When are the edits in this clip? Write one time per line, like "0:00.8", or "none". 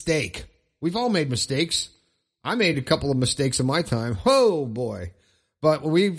none